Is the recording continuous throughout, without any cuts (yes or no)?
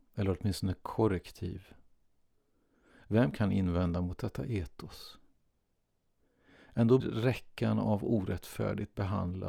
no